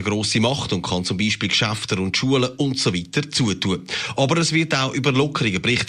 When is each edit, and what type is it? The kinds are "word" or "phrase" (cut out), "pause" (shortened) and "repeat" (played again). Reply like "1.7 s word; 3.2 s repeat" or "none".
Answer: none